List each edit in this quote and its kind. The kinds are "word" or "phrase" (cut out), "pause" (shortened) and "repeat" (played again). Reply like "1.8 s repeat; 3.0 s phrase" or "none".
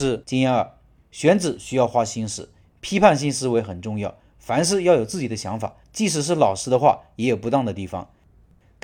5.8 s pause